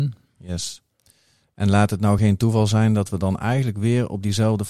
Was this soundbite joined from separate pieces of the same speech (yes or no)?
no